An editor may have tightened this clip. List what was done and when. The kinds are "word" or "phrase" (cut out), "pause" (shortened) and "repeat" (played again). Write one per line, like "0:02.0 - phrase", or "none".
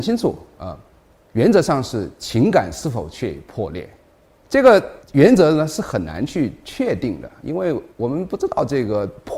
0:05.0 - pause
0:07.9 - pause